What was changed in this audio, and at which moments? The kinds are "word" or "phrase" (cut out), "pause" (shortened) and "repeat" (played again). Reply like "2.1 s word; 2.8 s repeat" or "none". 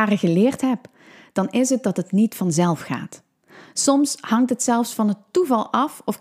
none